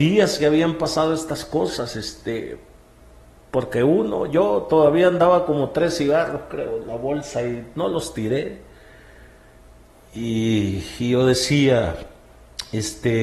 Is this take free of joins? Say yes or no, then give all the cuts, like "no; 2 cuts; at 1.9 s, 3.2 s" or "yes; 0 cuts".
yes; 0 cuts